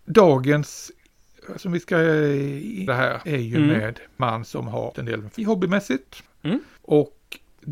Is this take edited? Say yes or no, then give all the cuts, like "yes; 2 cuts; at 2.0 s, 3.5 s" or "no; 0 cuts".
yes; 6 cuts; at 1.6 s, 2.9 s, 3.3 s, 4.2 s, 4.9 s, 5.4 s